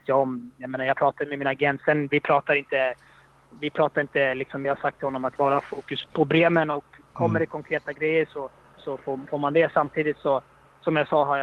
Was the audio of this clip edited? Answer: yes; 4 cuts; at 4.6 s, 5.4 s, 6.1 s, 8.8 s

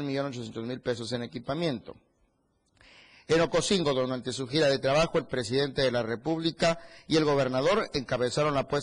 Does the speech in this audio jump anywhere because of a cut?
no; 0 cuts

